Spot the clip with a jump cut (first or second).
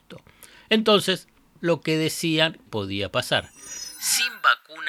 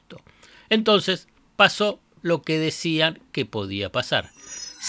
first